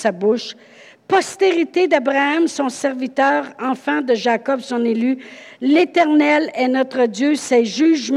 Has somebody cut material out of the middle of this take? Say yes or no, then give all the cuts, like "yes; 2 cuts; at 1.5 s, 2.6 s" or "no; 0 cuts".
no; 0 cuts